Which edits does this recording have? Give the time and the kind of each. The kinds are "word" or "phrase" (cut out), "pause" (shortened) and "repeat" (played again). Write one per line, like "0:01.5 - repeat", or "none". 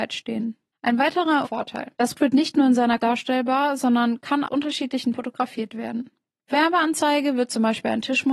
0:01.4 - word
0:02.1 - word
0:03.0 - word
0:04.4 - word
0:05.1 - word
0:06.5 - word